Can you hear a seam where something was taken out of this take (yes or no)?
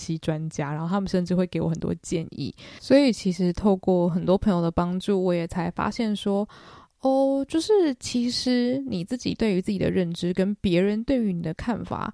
no